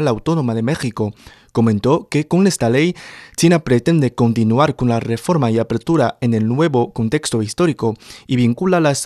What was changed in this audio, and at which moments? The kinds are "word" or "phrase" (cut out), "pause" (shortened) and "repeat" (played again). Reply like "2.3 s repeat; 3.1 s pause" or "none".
none